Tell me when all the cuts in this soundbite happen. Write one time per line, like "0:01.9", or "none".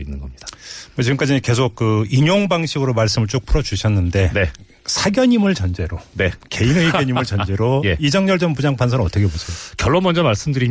none